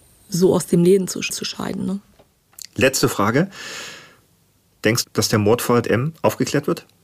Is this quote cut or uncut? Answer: cut